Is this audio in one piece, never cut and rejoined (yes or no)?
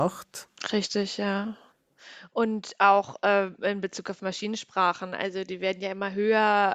yes